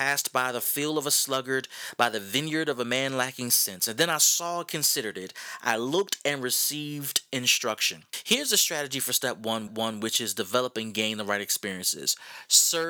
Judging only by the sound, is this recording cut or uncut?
cut